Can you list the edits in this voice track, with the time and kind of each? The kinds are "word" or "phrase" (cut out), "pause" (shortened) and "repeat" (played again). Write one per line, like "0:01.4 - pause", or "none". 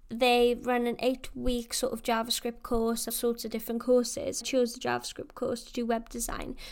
0:03.1 - phrase
0:04.4 - word